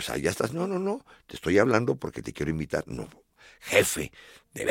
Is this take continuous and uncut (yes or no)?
yes